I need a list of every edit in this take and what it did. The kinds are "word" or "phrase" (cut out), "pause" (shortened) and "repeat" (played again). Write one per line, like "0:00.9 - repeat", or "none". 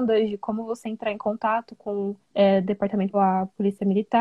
0:02.2 - pause
0:03.1 - word